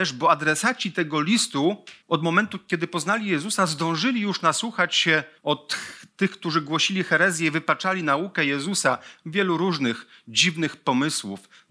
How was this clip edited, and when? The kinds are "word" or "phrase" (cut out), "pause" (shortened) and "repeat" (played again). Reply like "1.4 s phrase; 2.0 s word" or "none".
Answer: 2.0 s pause; 5.4 s pause